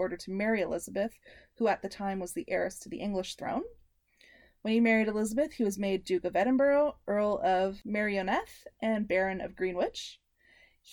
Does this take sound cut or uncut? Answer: uncut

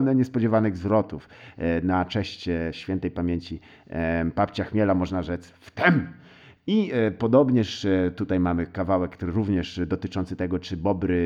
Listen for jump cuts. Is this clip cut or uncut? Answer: uncut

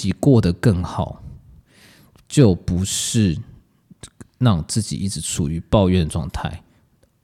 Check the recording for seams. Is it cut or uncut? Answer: uncut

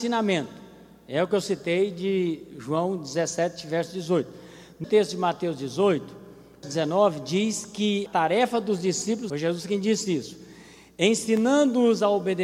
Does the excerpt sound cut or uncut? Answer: cut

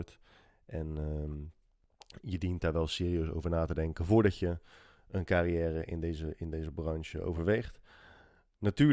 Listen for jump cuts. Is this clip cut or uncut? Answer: uncut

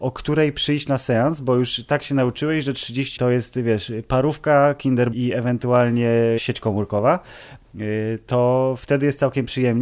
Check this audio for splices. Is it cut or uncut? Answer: cut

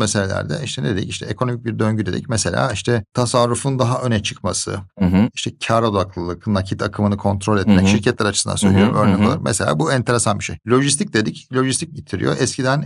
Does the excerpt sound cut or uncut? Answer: cut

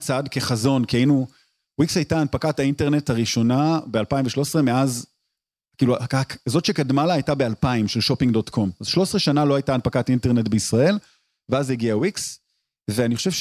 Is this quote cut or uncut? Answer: uncut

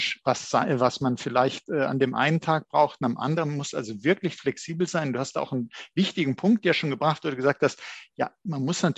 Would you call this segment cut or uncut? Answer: uncut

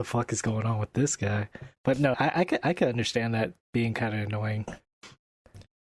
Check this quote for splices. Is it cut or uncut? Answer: cut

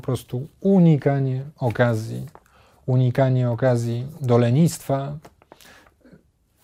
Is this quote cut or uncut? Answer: uncut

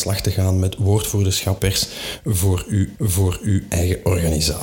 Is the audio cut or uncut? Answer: cut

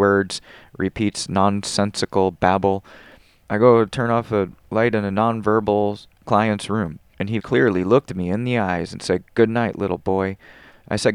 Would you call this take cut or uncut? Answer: cut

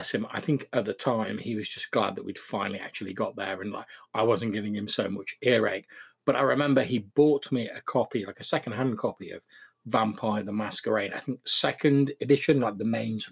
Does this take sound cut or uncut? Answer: uncut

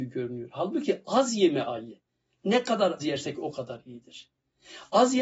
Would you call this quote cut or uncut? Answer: cut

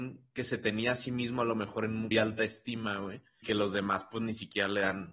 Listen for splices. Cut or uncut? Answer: cut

